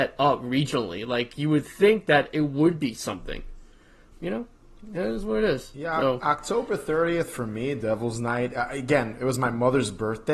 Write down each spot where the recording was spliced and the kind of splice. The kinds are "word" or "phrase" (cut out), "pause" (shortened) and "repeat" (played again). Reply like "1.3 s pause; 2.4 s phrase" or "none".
4.1 s word